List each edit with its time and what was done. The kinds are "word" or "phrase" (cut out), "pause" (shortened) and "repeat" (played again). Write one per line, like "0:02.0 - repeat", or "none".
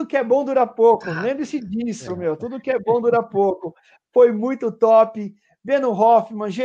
none